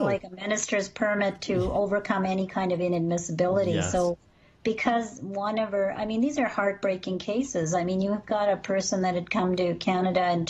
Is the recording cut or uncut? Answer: uncut